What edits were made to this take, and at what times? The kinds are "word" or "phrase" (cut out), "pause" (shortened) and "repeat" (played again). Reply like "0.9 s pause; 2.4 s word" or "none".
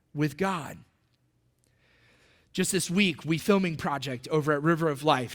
3.4 s phrase